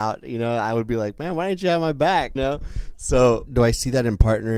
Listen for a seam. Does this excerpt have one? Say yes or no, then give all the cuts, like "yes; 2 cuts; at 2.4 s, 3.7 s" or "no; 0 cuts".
yes; 2 cuts; at 2.4 s, 3.5 s